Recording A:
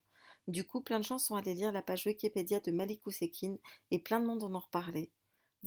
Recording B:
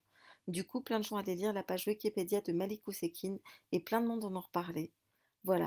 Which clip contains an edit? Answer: B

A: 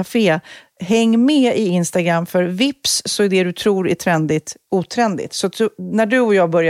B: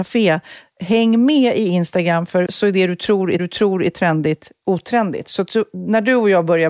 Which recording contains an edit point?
B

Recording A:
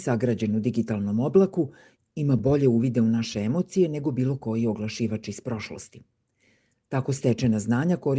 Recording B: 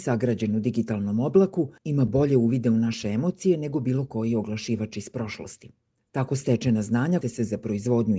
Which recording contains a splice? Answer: B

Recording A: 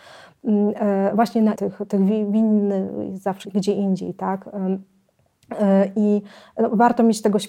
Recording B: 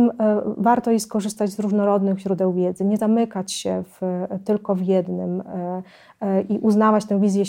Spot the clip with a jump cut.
A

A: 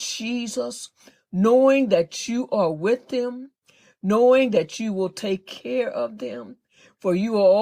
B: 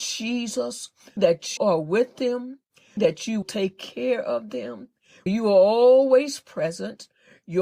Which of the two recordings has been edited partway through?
B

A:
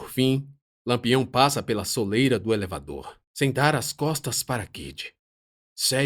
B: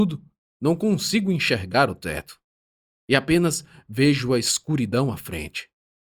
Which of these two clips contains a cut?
A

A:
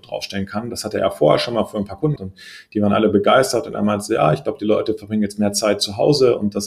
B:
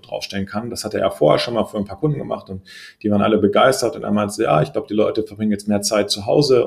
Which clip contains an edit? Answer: A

